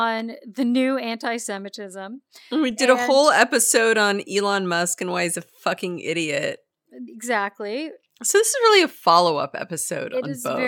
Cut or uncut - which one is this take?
uncut